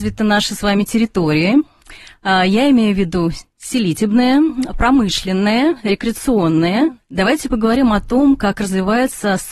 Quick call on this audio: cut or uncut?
uncut